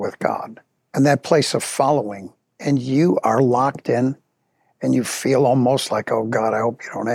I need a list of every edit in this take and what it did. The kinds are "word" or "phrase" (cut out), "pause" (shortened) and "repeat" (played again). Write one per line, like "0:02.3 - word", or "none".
none